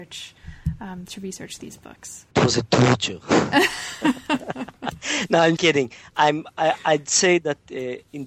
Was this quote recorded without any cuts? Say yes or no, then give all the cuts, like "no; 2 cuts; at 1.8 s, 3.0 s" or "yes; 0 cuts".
no; 2 cuts; at 2.3 s, 5.6 s